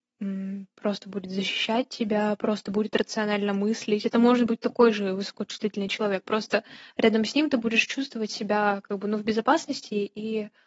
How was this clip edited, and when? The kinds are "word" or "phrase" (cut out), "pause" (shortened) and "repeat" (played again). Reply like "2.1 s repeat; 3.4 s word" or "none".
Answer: none